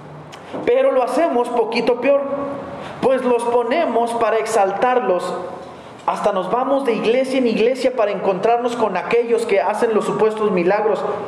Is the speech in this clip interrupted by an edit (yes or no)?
no